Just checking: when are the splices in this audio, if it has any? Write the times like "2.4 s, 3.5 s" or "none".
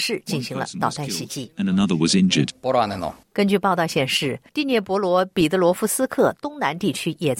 3.2 s, 4.5 s

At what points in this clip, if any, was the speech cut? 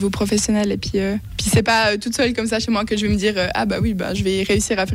none

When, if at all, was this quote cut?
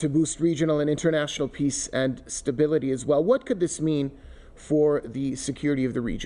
none

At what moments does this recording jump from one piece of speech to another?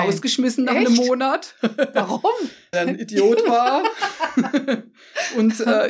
2.7 s

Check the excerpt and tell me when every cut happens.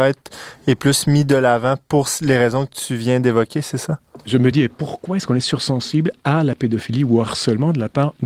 none

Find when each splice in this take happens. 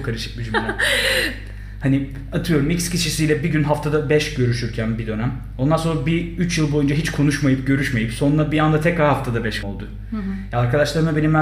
9.6 s

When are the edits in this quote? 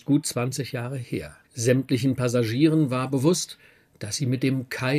1.4 s

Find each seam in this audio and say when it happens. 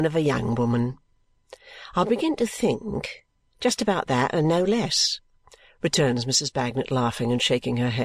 none

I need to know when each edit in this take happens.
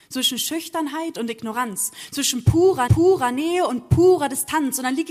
2.9 s

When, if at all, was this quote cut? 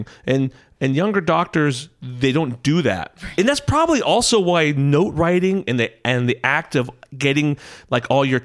none

